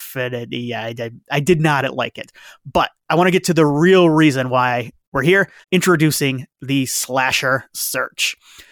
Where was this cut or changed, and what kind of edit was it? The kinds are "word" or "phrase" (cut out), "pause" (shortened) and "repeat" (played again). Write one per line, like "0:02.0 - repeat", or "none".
0:05.6 - pause